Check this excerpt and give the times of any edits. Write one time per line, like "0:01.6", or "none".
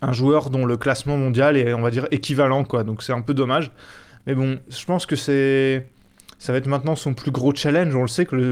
none